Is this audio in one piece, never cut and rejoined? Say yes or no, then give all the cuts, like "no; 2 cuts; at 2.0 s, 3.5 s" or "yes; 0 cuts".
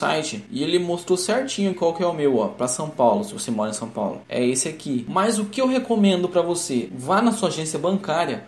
no; 1 cut; at 1.7 s